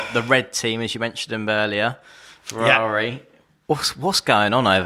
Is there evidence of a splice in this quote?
no; 0 cuts

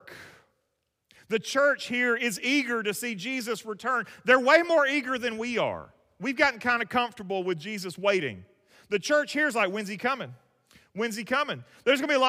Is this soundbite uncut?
yes; 0 cuts

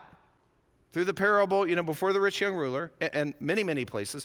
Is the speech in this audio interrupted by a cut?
no; 0 cuts

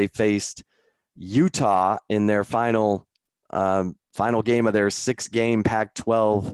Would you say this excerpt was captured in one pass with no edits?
yes; 0 cuts

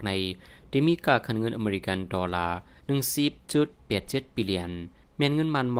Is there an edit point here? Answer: no; 0 cuts

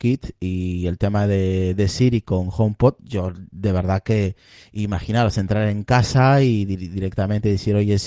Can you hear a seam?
no; 0 cuts

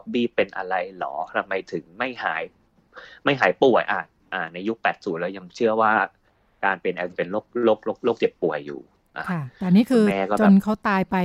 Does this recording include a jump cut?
yes; 1 cut; at 7.1 s

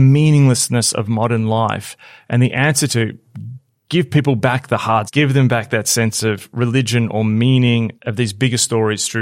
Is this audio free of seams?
no; 3 cuts; at 2.9 s, 5.1 s, 8.0 s

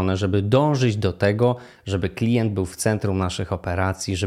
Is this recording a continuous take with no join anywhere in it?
yes; 0 cuts

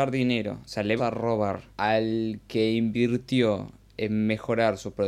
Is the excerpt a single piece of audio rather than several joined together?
no; 2 cuts; at 1.0 s, 1.7 s

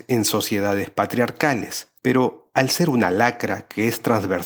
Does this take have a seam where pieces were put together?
yes; 1 cut; at 2.0 s

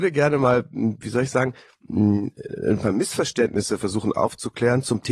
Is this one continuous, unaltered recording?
yes; 0 cuts

